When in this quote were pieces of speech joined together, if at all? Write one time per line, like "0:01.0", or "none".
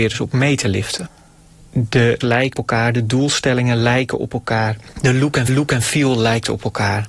0:02.2
0:02.5
0:04.9
0:05.5